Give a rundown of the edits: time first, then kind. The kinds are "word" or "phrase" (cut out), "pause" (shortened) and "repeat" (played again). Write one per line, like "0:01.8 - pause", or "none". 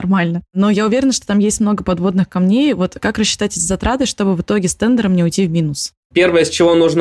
none